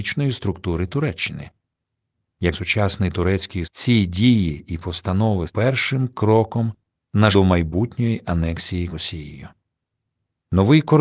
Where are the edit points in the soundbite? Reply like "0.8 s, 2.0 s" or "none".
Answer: 2.5 s, 3.6 s, 5.5 s, 7.3 s, 8.9 s